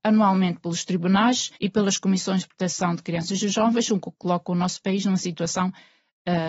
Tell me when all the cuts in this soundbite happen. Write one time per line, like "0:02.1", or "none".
0:01.6

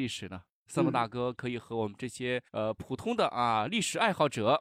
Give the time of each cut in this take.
0:02.5

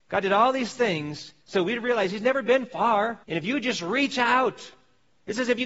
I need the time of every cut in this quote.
0:01.4
0:03.2

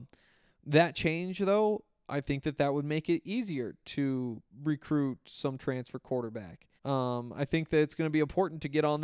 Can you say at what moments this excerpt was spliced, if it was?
0:04.5
0:06.8

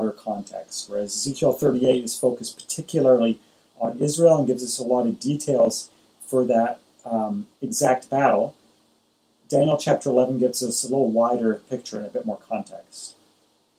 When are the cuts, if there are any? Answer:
0:07.5

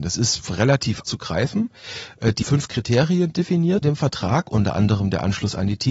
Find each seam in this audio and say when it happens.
0:01.0
0:02.4
0:03.8

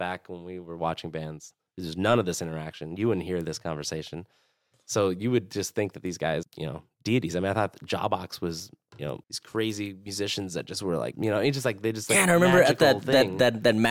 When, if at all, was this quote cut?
0:06.4
0:09.2
0:11.1

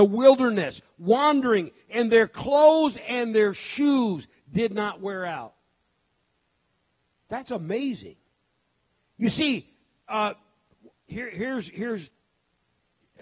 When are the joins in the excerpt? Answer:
none

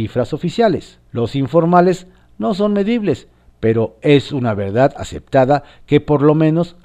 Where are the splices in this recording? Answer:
0:01.1

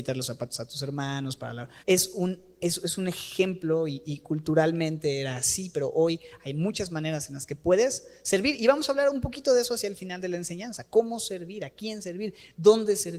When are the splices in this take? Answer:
0:01.8

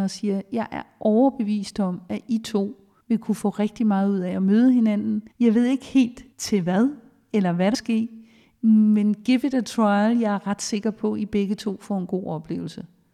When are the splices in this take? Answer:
0:03.0
0:05.3
0:06.3
0:07.7

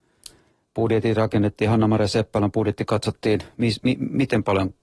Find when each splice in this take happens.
none

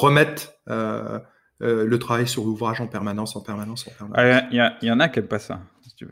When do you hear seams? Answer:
none

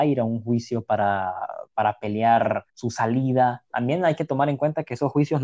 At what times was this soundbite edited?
0:01.7
0:02.7

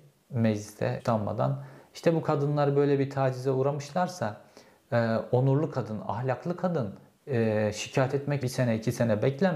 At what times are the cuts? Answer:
0:01.0
0:08.4

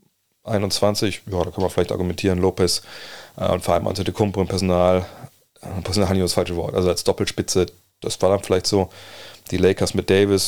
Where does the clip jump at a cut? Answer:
none

